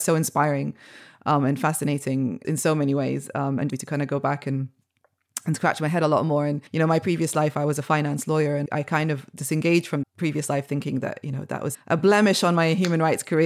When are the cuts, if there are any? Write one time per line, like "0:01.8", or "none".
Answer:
0:02.4
0:03.7
0:06.7
0:08.7
0:10.0
0:11.7